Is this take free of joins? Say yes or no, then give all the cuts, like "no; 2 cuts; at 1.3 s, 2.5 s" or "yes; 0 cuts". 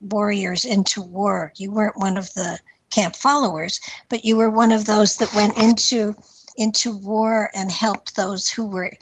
no; 2 cuts; at 6.5 s, 7.5 s